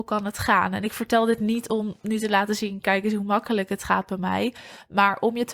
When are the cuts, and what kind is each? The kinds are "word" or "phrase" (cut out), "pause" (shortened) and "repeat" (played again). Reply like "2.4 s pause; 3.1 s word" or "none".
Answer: none